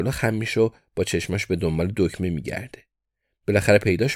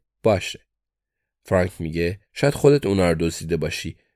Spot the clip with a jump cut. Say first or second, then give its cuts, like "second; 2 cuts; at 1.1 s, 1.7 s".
second; 1 cut; at 2.2 s